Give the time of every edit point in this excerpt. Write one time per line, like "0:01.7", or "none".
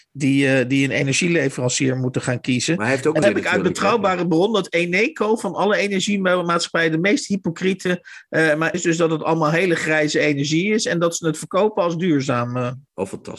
0:03.2
0:08.7